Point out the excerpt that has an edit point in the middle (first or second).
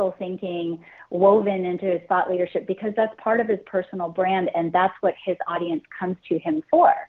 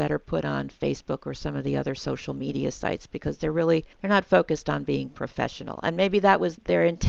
second